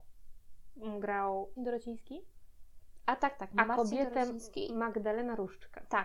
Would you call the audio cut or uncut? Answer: cut